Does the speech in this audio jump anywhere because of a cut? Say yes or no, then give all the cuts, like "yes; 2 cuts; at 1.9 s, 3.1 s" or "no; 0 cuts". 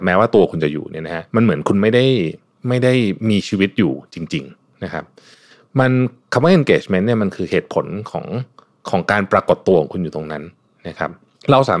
yes; 3 cuts; at 1.3 s, 2.6 s, 4.5 s